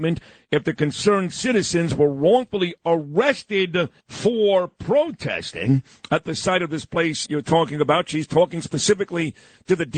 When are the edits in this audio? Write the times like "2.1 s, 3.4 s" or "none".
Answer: 4.0 s, 7.2 s